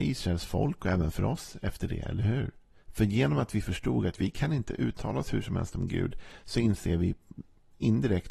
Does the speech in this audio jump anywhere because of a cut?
no; 0 cuts

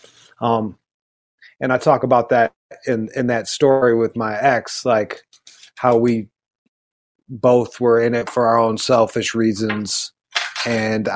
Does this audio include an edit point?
no; 0 cuts

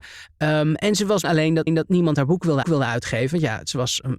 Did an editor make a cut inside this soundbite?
yes; 3 cuts; at 1.2 s, 1.7 s, 2.6 s

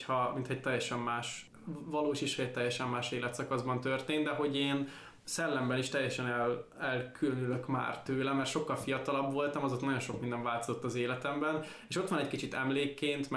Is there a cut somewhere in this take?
no; 0 cuts

